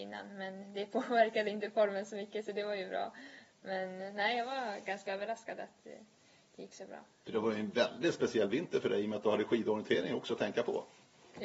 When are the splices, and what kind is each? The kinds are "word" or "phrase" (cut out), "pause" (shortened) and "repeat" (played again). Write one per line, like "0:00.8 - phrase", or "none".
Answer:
none